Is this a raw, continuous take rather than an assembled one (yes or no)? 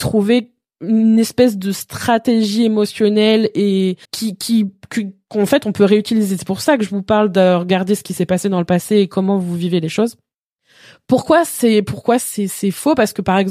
no